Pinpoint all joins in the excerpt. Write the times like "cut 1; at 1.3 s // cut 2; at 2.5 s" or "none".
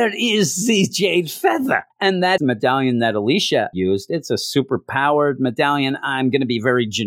cut 1; at 1.9 s // cut 2; at 2.4 s // cut 3; at 3.7 s